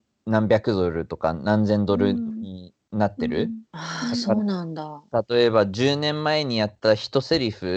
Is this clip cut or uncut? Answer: cut